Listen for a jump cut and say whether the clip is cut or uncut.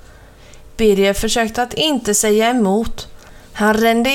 uncut